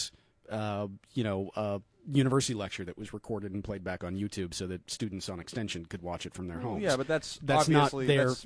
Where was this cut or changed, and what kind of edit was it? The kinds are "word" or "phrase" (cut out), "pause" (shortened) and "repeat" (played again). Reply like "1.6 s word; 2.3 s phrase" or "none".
1.9 s pause